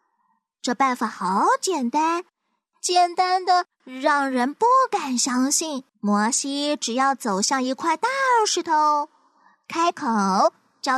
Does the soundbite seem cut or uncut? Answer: cut